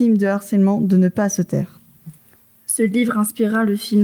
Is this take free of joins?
yes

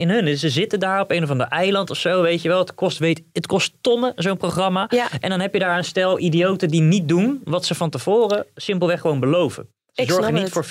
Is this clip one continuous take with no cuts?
yes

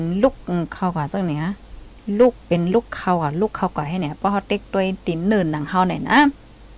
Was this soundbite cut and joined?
yes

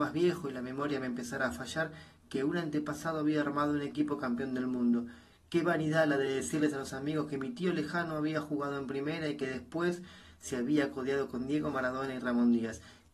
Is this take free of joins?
yes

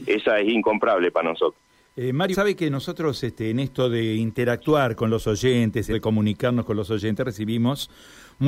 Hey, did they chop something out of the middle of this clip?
yes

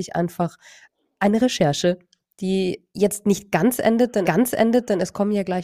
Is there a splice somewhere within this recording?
yes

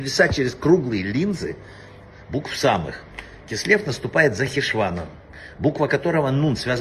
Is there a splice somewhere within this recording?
no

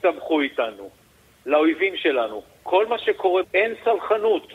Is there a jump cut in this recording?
yes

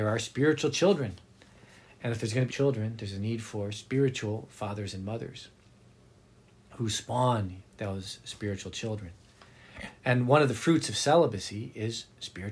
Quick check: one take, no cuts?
no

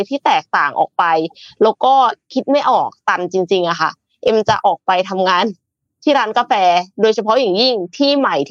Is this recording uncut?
yes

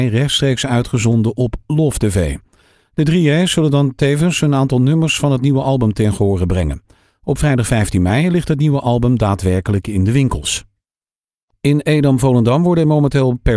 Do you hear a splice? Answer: no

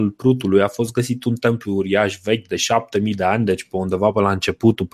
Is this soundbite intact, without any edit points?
yes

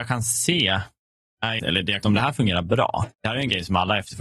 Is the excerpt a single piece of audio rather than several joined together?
no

